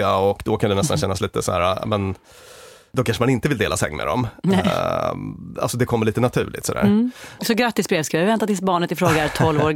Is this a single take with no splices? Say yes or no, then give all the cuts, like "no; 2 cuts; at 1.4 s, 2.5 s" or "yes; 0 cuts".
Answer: yes; 0 cuts